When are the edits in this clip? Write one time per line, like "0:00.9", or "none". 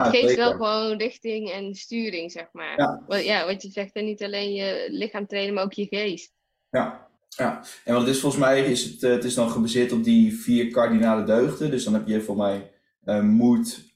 0:07.2